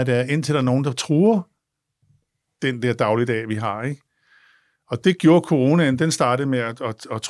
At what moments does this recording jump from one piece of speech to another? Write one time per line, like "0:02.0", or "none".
none

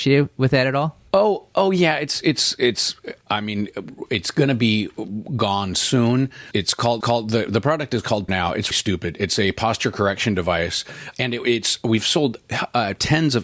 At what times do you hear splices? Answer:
0:01.1
0:02.2
0:07.0
0:08.3
0:08.7
0:11.1

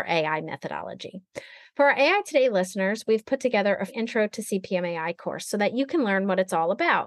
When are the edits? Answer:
0:03.9

